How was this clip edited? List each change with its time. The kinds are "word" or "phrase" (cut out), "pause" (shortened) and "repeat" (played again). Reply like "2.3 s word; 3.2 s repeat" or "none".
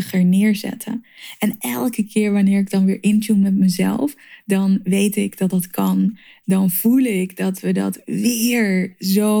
none